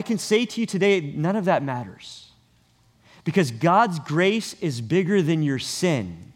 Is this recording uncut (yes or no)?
yes